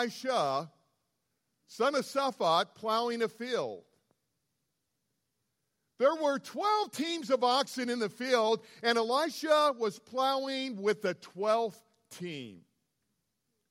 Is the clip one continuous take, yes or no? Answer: yes